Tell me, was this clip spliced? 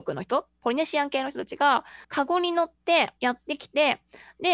yes; 2 cuts; at 2.0 s, 3.2 s

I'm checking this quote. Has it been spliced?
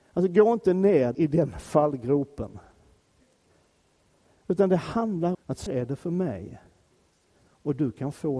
yes; 3 cuts; at 1.1 s, 5.3 s, 5.7 s

